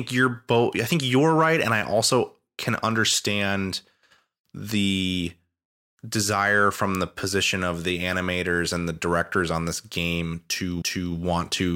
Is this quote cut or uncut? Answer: cut